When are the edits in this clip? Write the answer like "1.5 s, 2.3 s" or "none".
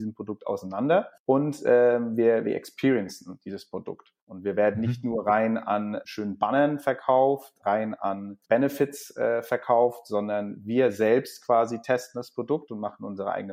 1.2 s, 4.2 s, 8.4 s